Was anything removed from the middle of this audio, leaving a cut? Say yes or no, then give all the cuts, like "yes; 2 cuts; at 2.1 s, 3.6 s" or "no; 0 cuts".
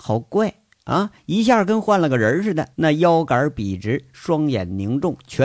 yes; 1 cut; at 2.7 s